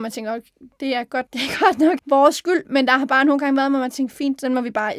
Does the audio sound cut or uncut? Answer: cut